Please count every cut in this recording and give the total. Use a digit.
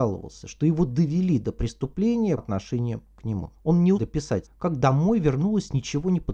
4